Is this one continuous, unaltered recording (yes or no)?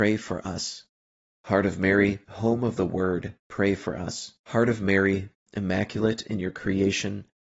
no